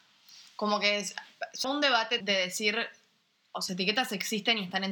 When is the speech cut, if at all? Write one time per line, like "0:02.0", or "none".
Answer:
0:01.6
0:02.2
0:03.7